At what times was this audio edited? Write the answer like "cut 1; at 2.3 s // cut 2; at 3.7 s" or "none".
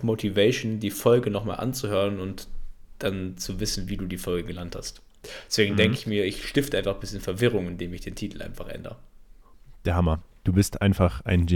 none